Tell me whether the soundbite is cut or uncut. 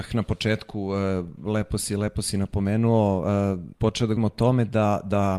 cut